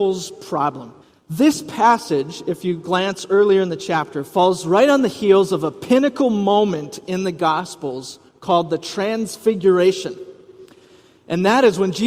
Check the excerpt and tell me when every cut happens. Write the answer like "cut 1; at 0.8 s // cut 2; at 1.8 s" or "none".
cut 1; at 1.0 s // cut 2; at 8.3 s